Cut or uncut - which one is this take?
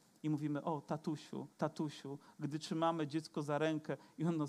cut